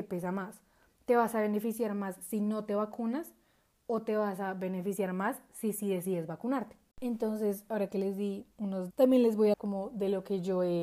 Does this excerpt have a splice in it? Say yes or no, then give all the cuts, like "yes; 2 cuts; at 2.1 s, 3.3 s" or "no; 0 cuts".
yes; 3 cuts; at 6.9 s, 8.9 s, 9.5 s